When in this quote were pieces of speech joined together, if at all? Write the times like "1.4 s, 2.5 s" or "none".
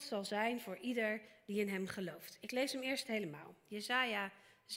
none